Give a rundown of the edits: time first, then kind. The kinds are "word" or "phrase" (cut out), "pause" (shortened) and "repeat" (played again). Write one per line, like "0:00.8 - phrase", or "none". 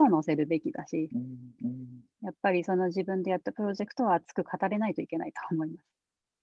0:01.6 - repeat